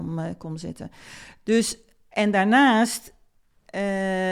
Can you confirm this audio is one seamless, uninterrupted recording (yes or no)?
yes